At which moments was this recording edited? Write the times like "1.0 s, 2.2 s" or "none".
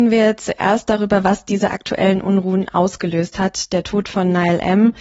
none